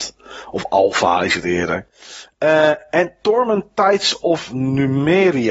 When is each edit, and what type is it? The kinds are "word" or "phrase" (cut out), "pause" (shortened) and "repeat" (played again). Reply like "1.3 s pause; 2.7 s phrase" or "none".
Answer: none